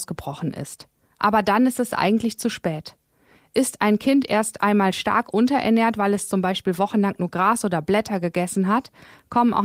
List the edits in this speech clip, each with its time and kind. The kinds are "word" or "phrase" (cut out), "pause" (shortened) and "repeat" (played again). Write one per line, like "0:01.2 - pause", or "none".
none